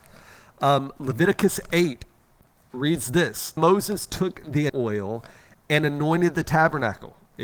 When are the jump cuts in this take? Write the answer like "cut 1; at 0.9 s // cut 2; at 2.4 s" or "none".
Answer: cut 1; at 3.6 s // cut 2; at 4.7 s